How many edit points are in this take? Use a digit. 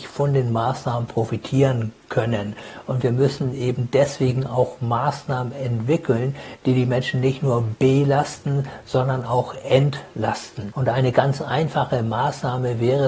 0